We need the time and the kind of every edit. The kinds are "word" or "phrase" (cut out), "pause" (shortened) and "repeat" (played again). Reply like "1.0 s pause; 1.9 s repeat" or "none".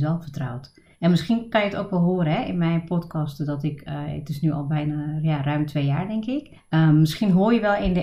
0.9 s pause; 6.6 s pause